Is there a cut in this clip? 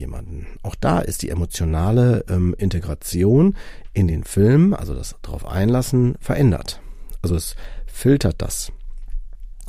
no; 0 cuts

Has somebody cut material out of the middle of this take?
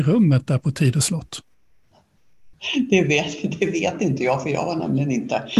no; 0 cuts

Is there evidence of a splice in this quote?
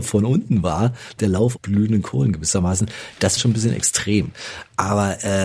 yes; 2 cuts; at 1.6 s, 3.4 s

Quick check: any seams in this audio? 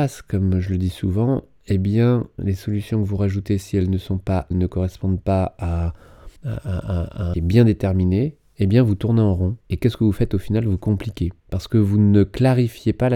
yes; 6 cuts; at 2.4 s, 4.5 s, 6.4 s, 7.3 s, 9.6 s, 11.4 s

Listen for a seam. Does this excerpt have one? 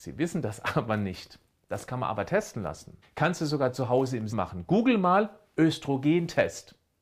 yes; 2 cuts; at 3.0 s, 4.3 s

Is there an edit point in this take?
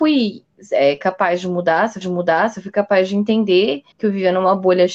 yes; 2 cuts; at 2.0 s, 3.9 s

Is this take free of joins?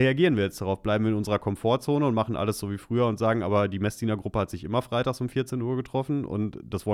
yes; 0 cuts

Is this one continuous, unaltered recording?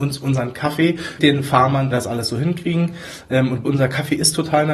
no; 3 cuts; at 1.2 s, 1.9 s, 3.6 s

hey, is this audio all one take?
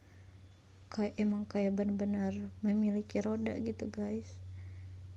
yes; 0 cuts

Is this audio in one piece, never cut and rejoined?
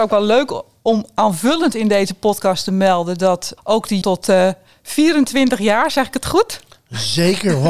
no; 2 cuts; at 3.6 s, 4.0 s

